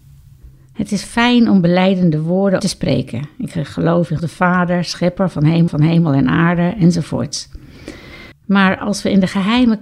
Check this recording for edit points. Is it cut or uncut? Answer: cut